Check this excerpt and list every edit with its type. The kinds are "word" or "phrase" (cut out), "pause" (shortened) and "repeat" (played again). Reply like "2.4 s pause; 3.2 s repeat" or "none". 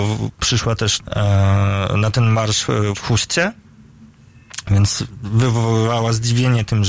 1.0 s word